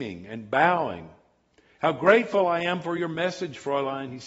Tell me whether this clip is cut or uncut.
uncut